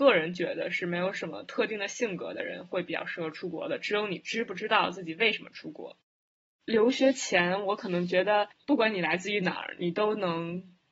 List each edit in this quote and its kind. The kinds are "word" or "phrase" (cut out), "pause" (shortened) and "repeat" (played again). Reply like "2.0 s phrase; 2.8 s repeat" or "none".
none